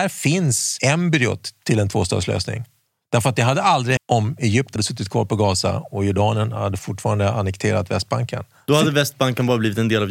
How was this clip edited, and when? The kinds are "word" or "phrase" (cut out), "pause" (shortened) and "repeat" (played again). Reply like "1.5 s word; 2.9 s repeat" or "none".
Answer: 4.0 s word; 4.8 s word; 6.8 s word